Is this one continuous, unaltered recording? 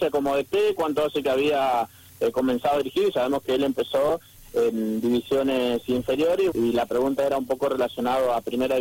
no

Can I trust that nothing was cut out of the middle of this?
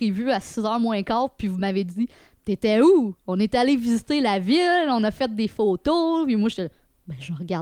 yes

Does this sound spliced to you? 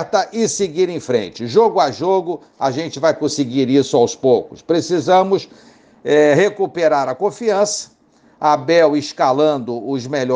no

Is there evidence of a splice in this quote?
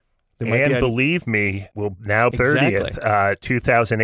yes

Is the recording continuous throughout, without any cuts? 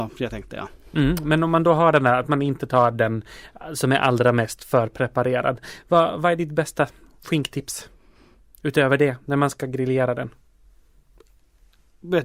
yes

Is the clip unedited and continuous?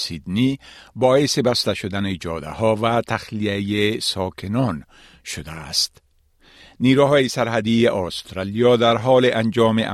yes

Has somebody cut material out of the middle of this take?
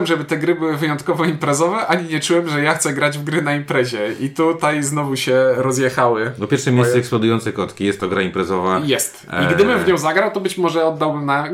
no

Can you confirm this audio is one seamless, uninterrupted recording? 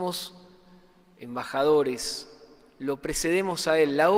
yes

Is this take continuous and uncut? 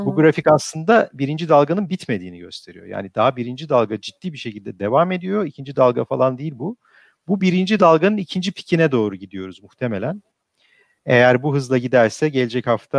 yes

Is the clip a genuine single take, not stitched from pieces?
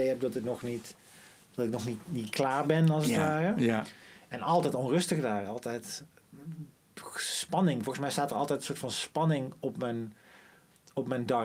yes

